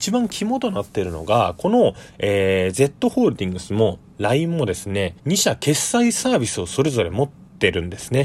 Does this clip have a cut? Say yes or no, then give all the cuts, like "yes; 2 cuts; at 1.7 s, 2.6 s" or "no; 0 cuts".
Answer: yes; 1 cut; at 5.2 s